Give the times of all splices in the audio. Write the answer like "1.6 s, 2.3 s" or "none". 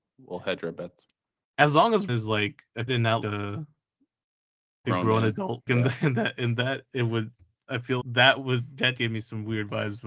2.1 s, 2.9 s, 3.2 s, 4.8 s, 5.7 s, 8.0 s, 9.0 s